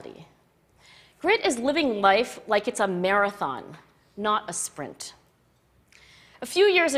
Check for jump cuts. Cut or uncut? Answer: uncut